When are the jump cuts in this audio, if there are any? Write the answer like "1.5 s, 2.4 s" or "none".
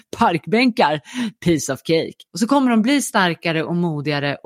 2.3 s